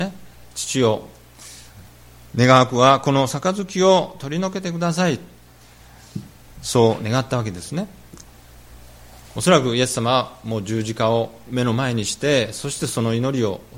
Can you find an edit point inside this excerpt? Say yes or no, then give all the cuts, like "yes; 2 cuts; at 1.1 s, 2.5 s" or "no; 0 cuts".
no; 0 cuts